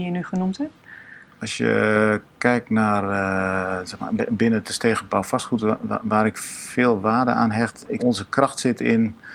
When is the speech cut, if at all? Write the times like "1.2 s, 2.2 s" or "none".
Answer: 8.0 s